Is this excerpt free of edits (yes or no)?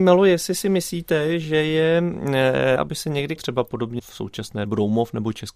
no